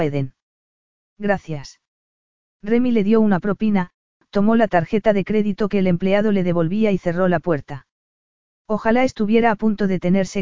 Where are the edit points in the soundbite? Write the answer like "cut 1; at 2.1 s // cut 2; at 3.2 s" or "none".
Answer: none